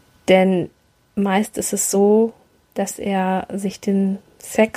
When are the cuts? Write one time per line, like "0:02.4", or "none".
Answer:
none